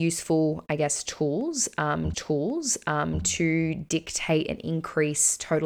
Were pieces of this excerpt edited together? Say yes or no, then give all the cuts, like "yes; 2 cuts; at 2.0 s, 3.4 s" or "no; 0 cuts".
yes; 1 cut; at 2.1 s